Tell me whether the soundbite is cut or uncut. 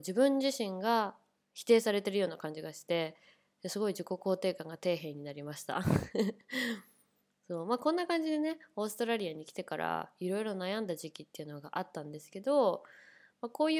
uncut